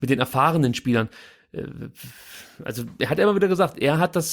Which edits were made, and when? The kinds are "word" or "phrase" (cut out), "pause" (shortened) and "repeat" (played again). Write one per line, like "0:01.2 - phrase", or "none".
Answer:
none